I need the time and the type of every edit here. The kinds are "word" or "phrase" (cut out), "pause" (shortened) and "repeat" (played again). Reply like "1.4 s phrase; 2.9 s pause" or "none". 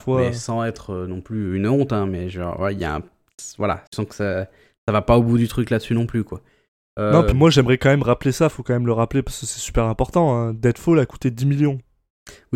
3.9 s pause; 7.3 s word